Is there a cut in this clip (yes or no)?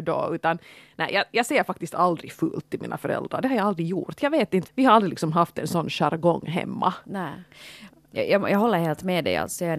yes